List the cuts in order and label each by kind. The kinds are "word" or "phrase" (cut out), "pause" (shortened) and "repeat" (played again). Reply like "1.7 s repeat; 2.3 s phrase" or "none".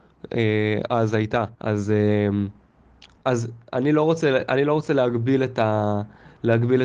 1.5 s pause